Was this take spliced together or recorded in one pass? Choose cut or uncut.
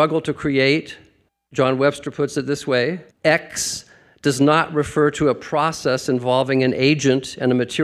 cut